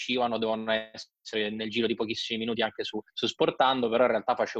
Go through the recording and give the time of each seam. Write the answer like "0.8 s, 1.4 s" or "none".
3.1 s